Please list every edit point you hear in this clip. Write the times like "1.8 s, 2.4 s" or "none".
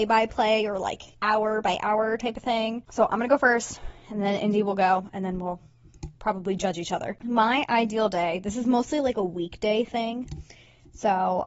1.1 s